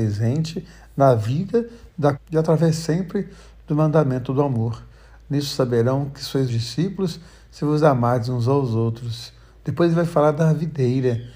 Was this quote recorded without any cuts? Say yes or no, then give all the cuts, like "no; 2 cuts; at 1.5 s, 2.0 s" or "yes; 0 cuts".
no; 2 cuts; at 2.1 s, 6.5 s